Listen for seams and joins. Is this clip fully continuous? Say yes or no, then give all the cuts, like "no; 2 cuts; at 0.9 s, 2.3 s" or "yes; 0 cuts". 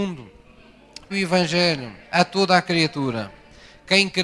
no; 2 cuts; at 1.1 s, 2.0 s